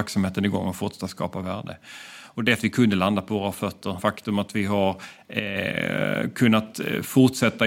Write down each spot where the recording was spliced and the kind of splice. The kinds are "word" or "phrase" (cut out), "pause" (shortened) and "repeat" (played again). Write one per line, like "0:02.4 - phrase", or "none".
0:02.6 - phrase
0:04.0 - word

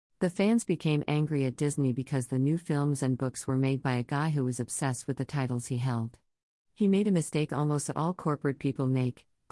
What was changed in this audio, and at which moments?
none

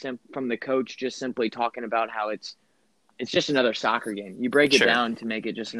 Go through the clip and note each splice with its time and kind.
none

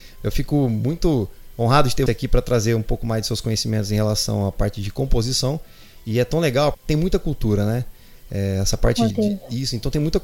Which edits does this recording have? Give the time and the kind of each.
0:02.1 - word
0:06.7 - word
0:09.1 - word

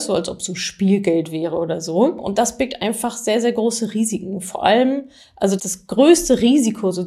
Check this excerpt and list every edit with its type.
0:05.6 - word

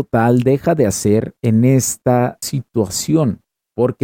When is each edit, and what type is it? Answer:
0:01.4 - pause
0:02.4 - word

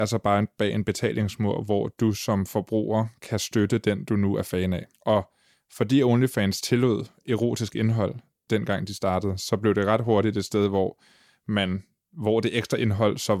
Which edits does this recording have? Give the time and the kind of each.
0:04.9 - pause

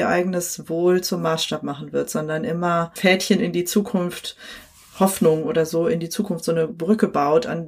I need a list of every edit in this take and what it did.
none

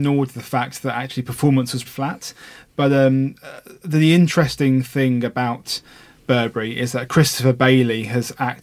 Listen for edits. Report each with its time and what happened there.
0:01.8 - word

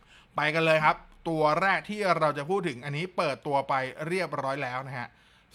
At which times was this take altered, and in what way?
none

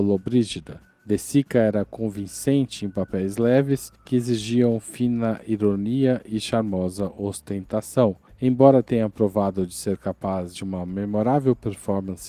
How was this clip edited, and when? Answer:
none

